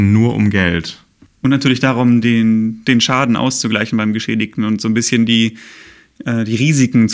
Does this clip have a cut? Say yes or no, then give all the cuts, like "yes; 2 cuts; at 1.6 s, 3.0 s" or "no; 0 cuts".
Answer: no; 0 cuts